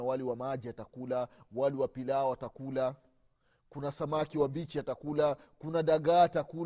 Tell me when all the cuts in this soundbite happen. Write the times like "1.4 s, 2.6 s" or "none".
none